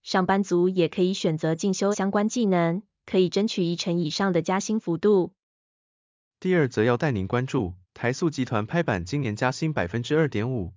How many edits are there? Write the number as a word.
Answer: two